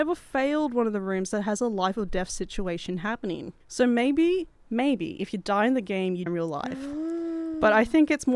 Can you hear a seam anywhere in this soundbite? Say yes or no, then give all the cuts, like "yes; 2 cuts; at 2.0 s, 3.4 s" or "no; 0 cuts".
yes; 2 cuts; at 3.6 s, 6.3 s